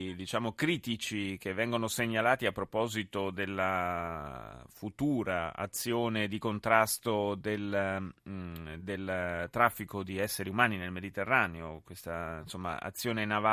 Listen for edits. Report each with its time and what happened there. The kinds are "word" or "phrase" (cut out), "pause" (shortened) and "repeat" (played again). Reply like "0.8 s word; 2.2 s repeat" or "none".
none